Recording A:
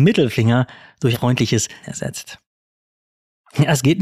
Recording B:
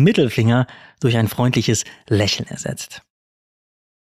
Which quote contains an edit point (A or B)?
A